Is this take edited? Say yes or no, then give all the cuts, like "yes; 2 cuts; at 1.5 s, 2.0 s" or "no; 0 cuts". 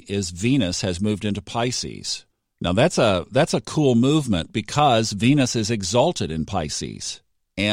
no; 0 cuts